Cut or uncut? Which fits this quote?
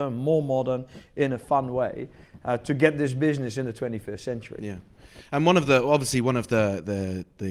uncut